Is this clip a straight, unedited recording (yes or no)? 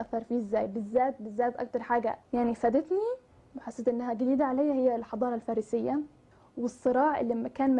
no